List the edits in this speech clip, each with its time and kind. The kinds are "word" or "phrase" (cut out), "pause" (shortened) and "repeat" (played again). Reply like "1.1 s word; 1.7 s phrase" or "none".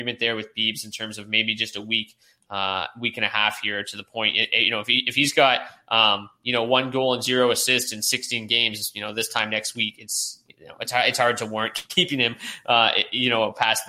none